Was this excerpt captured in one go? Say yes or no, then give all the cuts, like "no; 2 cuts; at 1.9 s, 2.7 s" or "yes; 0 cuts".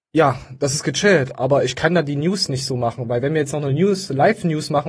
yes; 0 cuts